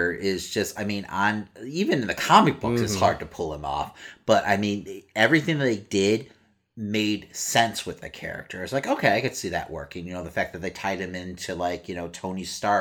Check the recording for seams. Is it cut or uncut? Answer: uncut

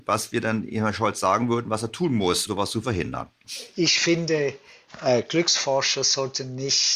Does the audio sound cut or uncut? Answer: cut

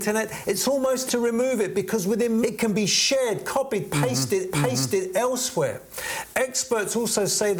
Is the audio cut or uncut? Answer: cut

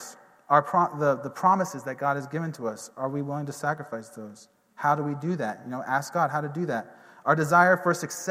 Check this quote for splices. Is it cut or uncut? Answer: uncut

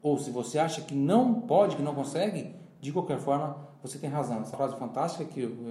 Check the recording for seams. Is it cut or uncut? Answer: cut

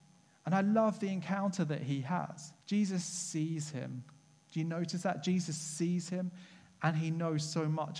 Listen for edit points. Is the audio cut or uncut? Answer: cut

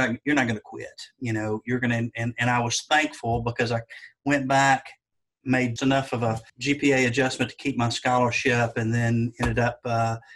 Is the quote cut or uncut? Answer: cut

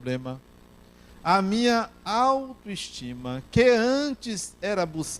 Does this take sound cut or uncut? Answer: uncut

